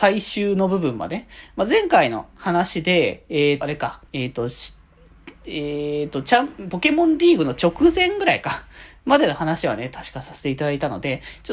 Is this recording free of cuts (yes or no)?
no